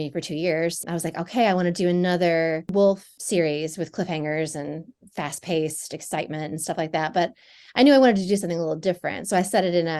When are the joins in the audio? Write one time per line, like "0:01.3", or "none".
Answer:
none